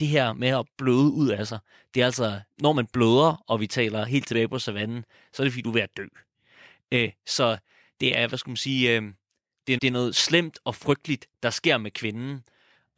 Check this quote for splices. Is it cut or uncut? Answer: cut